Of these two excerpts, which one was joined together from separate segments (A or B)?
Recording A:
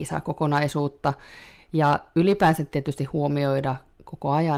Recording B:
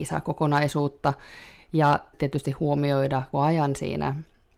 B